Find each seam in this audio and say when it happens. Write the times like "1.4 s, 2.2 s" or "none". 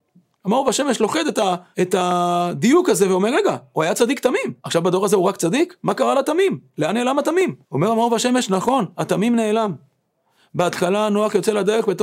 1.7 s, 4.6 s, 7.6 s